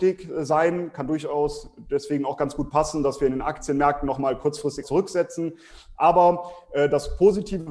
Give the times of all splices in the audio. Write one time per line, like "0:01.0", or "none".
0:04.8